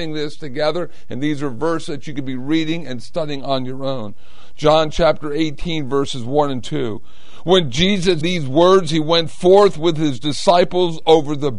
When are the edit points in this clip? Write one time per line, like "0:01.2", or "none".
0:08.2